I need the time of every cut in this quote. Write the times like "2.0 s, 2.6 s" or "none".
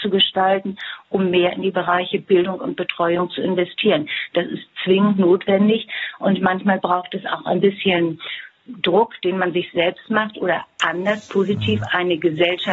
none